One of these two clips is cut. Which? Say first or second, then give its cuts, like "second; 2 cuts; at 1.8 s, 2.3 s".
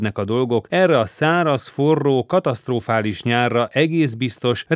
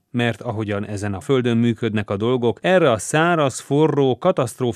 second; 1 cut; at 1.2 s